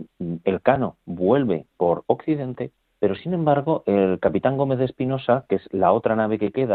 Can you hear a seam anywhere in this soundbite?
yes; 2 cuts; at 1.7 s, 2.8 s

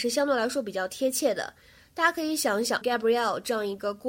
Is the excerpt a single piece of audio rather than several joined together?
no; 1 cut; at 2.8 s

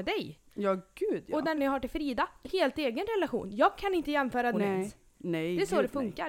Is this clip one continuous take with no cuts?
no; 3 cuts; at 1.6 s, 2.4 s, 4.5 s

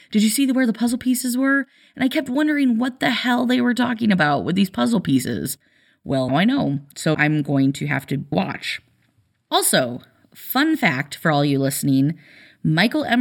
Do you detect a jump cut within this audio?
yes; 3 cuts; at 6.3 s, 7.1 s, 8.3 s

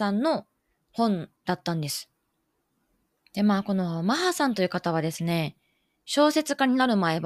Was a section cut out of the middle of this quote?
yes; 2 cuts; at 1.4 s, 2.4 s

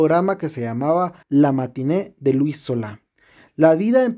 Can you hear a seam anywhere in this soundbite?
yes; 1 cut; at 1.2 s

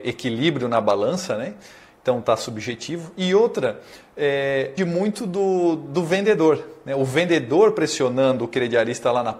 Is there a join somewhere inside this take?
yes; 1 cut; at 4.8 s

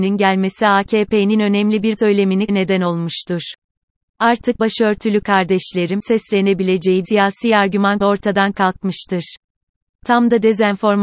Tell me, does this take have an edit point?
yes; 6 cuts; at 2.0 s, 2.5 s, 4.6 s, 6.0 s, 7.0 s, 8.0 s

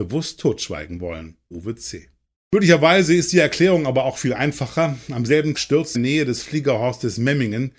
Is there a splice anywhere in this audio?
yes; 4 cuts; at 1.5 s, 2.3 s, 5.5 s, 5.9 s

